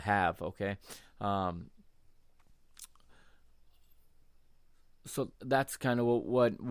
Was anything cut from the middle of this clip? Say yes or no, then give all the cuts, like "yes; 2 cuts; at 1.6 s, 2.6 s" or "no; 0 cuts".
yes; 1 cut; at 5.3 s